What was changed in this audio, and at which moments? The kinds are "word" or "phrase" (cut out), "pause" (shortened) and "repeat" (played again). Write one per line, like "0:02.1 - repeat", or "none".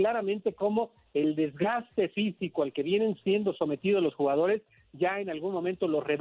none